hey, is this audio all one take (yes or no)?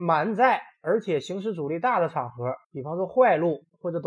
no